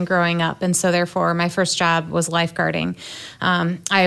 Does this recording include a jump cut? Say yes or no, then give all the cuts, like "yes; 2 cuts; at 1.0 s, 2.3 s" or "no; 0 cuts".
no; 0 cuts